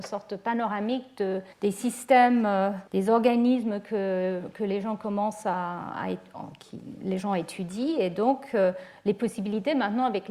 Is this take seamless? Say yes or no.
no